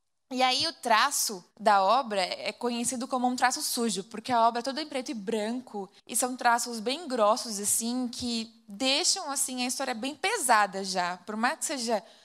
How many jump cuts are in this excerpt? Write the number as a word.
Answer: two